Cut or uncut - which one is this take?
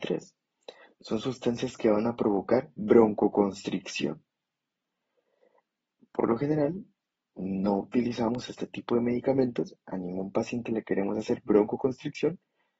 cut